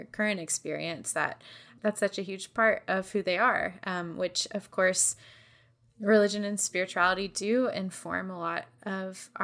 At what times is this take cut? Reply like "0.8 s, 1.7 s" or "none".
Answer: none